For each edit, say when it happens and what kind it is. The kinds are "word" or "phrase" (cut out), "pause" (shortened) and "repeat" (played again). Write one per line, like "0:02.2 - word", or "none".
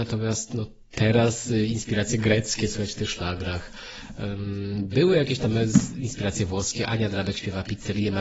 none